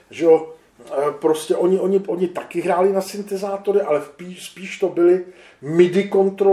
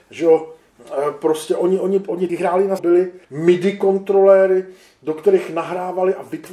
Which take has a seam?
second; 3 cuts; at 2.3 s, 2.8 s, 3.2 s

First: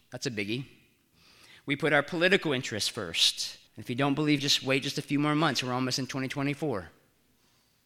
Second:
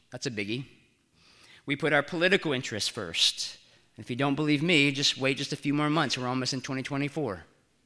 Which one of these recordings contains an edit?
first; 2 cuts; at 3.7 s, 4.4 s

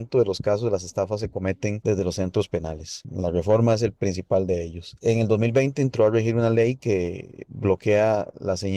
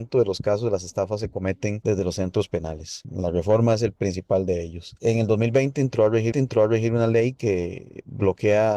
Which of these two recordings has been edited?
second; 1 cut; at 6.3 s

